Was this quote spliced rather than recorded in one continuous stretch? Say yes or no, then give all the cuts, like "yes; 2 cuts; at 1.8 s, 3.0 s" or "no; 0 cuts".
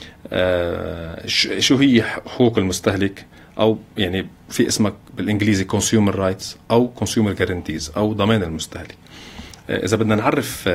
no; 0 cuts